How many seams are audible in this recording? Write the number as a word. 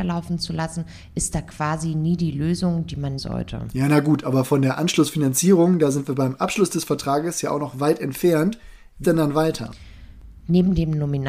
two